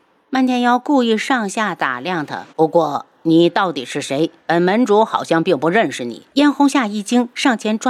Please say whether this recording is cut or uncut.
cut